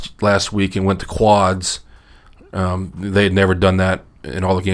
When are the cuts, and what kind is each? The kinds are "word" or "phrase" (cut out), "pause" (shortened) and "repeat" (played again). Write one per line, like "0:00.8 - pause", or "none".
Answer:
none